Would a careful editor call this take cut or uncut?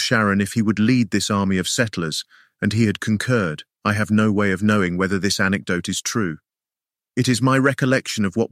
cut